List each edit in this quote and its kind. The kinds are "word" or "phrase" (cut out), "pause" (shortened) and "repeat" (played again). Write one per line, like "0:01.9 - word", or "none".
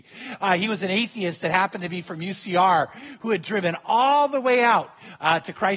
none

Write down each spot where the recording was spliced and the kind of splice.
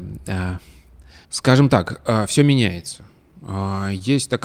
0:01.2 - pause

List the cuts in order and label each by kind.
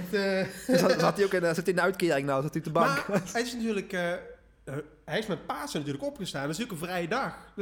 none

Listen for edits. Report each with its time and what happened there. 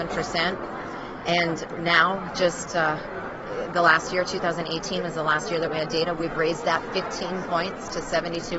none

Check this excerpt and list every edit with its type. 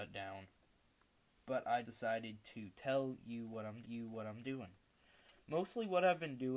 0:01.8 - word
0:03.8 - repeat

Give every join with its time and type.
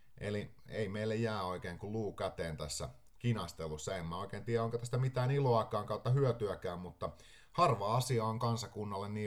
none

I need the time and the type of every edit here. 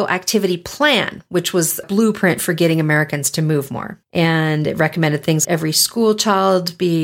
0:01.8 - phrase
0:04.0 - pause
0:05.4 - word

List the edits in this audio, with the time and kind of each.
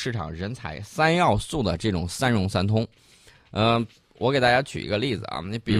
none

